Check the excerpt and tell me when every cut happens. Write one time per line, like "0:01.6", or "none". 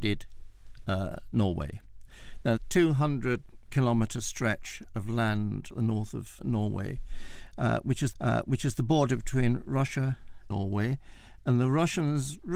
0:02.6
0:05.7
0:06.4
0:08.1
0:10.5